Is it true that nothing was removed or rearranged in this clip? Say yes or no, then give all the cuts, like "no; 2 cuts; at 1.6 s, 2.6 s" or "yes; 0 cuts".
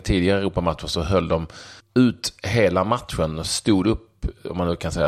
no; 1 cut; at 1.8 s